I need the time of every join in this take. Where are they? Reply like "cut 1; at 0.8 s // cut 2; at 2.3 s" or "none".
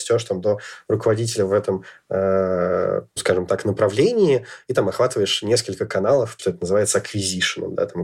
cut 1; at 3.2 s // cut 2; at 6.4 s